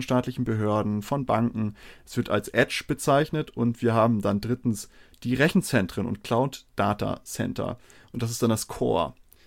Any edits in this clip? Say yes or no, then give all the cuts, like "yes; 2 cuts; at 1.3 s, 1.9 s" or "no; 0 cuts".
no; 0 cuts